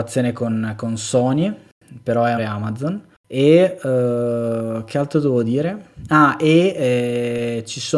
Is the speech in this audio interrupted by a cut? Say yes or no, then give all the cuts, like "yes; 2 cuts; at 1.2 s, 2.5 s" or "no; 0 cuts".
yes; 2 cuts; at 2.4 s, 3.1 s